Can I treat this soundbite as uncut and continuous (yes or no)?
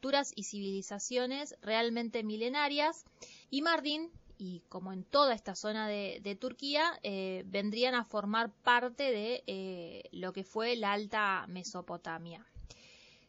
no